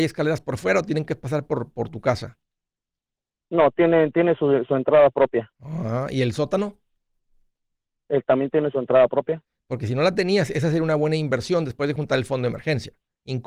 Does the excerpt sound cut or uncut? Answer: uncut